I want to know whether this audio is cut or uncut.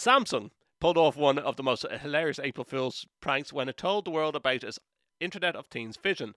uncut